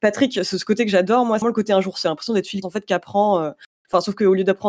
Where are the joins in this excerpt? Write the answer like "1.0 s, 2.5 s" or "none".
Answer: 1.4 s, 2.0 s, 2.6 s